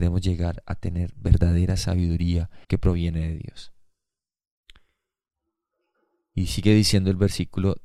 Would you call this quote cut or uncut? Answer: cut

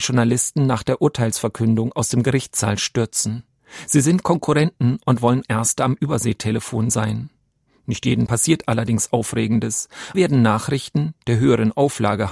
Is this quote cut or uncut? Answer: cut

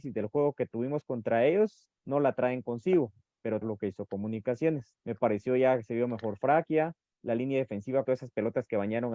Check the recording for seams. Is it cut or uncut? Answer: cut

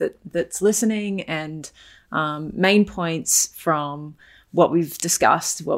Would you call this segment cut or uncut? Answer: uncut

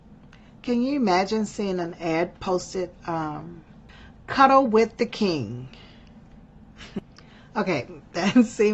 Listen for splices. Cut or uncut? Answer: cut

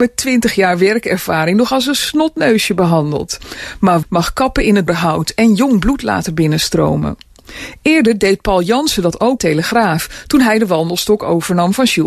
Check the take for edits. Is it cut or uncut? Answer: cut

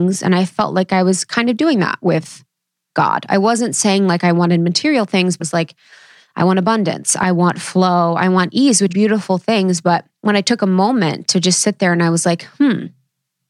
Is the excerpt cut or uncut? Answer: cut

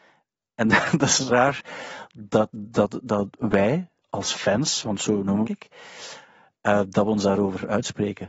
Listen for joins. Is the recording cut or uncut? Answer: cut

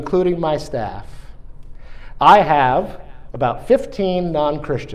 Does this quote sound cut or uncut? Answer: uncut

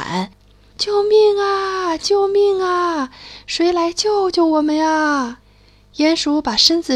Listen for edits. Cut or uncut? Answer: cut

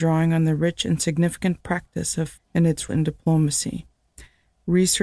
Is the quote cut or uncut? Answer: cut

